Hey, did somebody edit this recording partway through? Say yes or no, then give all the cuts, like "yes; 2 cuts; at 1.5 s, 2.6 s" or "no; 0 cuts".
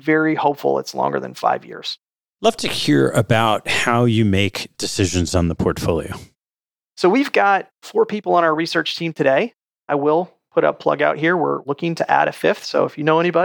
no; 0 cuts